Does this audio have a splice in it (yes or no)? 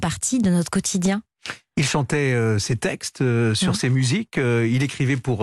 no